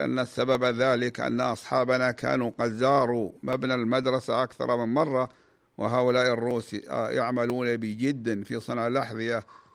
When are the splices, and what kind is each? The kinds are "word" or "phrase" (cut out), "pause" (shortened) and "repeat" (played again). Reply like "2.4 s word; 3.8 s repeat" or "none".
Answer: none